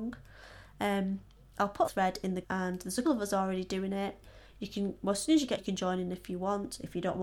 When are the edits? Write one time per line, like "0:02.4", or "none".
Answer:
0:01.8
0:02.4
0:03.0
0:05.6